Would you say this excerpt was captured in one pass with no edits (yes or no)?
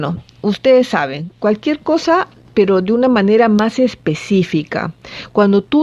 yes